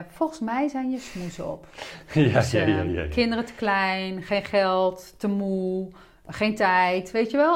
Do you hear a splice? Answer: no; 0 cuts

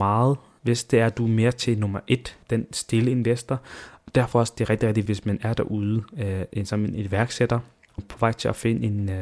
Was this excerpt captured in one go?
no; 4 cuts; at 2.4 s, 4.3 s, 5.1 s, 8.0 s

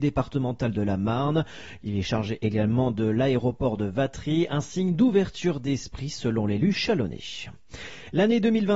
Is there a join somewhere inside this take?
no; 0 cuts

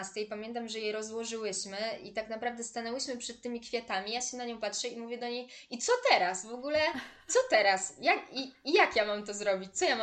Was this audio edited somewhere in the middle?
no; 0 cuts

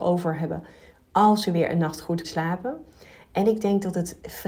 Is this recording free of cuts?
no; 1 cut; at 2.2 s

